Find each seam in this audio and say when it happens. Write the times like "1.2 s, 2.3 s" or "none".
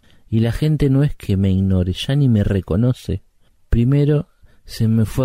none